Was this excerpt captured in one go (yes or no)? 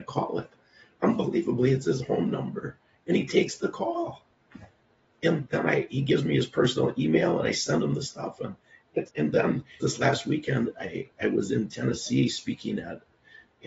no